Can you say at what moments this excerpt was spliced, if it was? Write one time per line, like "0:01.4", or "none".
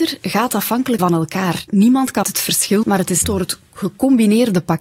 0:01.0
0:02.2
0:02.8
0:03.2